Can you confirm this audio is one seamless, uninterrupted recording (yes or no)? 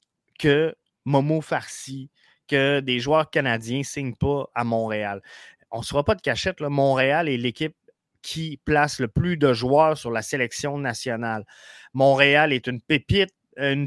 yes